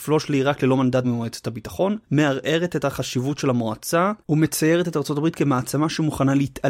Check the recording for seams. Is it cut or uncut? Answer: cut